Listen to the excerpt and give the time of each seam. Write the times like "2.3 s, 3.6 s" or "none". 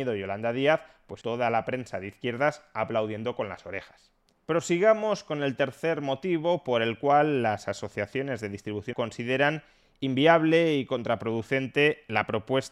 1.2 s, 8.9 s